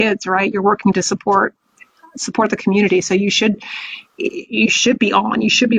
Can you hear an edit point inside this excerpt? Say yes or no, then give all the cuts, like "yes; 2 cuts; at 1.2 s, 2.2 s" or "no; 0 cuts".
no; 0 cuts